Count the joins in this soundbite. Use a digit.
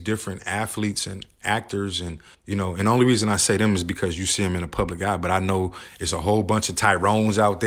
1